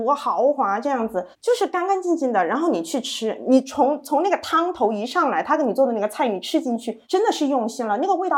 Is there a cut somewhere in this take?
yes; 2 cuts; at 1.3 s, 7.0 s

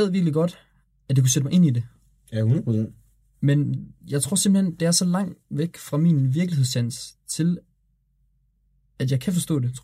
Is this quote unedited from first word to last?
yes; 0 cuts

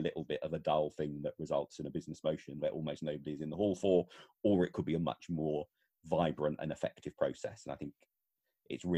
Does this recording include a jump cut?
no; 0 cuts

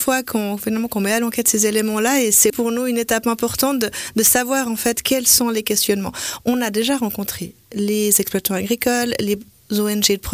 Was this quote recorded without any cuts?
no; 1 cut; at 2.5 s

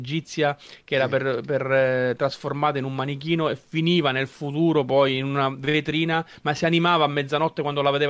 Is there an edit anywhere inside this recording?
no; 0 cuts

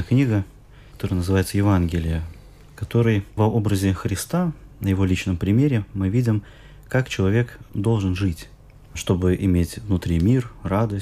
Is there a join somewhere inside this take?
no; 0 cuts

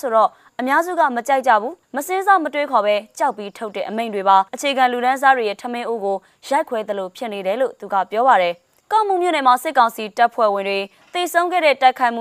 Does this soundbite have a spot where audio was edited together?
yes; 2 cuts; at 1.8 s, 4.5 s

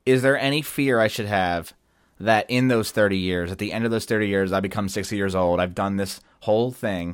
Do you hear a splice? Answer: no; 0 cuts

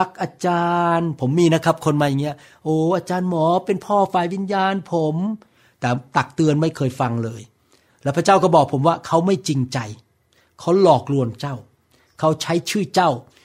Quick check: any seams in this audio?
no; 0 cuts

